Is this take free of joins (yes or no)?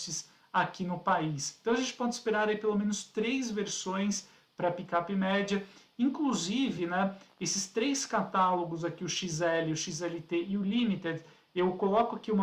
yes